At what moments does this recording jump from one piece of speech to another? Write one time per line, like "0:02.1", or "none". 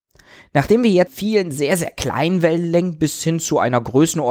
0:01.1